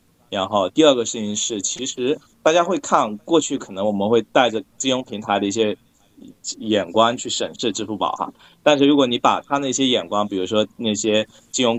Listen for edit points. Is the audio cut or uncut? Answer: uncut